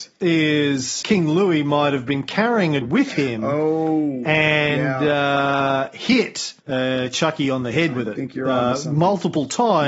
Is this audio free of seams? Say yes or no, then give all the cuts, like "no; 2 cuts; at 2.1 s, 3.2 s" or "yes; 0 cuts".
no; 3 cuts; at 1.0 s, 2.8 s, 6.6 s